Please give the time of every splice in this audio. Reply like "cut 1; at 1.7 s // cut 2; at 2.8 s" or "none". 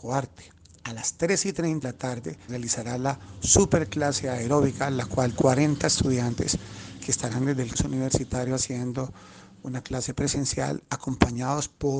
cut 1; at 1.8 s // cut 2; at 2.5 s // cut 3; at 5.3 s // cut 4; at 7.7 s

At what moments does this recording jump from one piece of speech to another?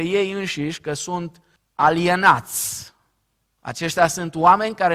cut 1; at 1.6 s

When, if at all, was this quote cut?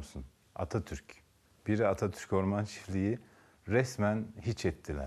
cut 1; at 1.5 s

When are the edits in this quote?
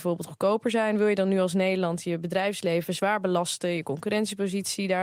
none

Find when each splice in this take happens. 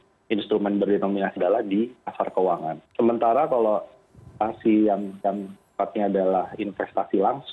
cut 1; at 1.4 s // cut 2; at 2.8 s // cut 3; at 5.2 s

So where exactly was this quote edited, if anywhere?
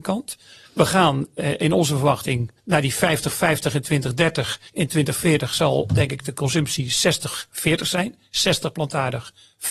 cut 1; at 2.6 s // cut 2; at 4.7 s

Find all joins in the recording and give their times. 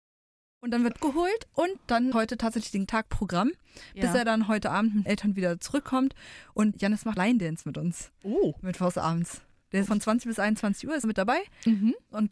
cut 1; at 0.9 s // cut 2; at 2.1 s // cut 3; at 2.9 s // cut 4; at 5.1 s // cut 5; at 6.7 s // cut 6; at 7.2 s // cut 7; at 9.9 s // cut 8; at 11.0 s

